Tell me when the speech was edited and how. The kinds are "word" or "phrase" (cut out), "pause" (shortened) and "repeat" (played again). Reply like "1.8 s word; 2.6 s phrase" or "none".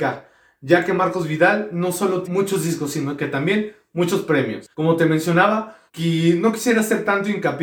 2.2 s word; 4.7 s pause; 5.9 s pause